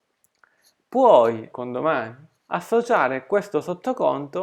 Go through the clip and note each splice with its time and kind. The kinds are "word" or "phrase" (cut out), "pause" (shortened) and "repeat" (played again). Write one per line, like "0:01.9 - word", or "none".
0:01.5 - word
0:02.4 - pause